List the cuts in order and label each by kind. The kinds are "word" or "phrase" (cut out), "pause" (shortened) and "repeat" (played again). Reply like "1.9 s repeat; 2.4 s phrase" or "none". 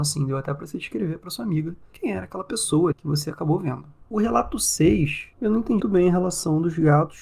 2.9 s word; 5.3 s pause; 5.8 s word